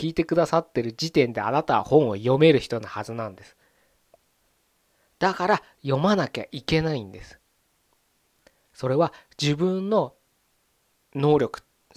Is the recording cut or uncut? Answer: uncut